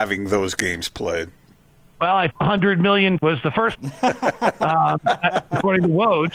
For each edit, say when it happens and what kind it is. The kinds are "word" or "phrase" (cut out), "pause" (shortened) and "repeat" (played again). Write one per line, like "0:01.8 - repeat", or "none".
0:02.3 - phrase
0:03.2 - word
0:03.7 - word